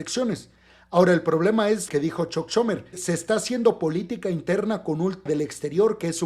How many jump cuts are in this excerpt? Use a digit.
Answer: 3